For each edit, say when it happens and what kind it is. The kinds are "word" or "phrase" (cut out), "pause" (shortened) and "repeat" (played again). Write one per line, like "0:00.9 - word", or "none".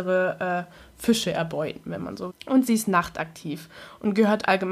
0:02.3 - word